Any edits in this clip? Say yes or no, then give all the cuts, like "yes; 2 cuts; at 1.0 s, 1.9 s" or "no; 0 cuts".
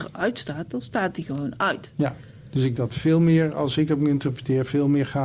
yes; 1 cut; at 2.8 s